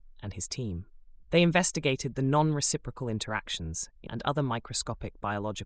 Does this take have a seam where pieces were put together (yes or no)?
yes